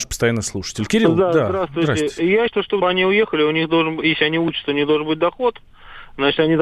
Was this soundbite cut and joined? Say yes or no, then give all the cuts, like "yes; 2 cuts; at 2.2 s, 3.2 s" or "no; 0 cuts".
yes; 2 cuts; at 2.5 s, 2.8 s